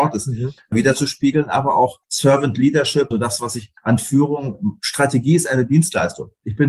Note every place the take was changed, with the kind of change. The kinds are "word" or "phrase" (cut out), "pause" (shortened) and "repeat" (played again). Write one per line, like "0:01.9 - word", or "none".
0:02.0 - pause
0:03.1 - word
0:03.8 - pause